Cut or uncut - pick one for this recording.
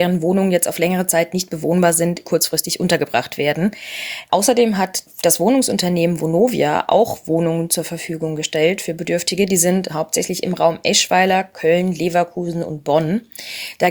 cut